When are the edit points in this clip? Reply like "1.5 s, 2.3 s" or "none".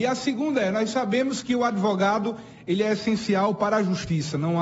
none